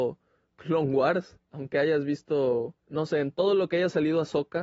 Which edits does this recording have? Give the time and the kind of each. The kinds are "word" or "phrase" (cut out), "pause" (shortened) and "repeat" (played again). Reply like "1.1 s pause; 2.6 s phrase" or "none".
2.8 s pause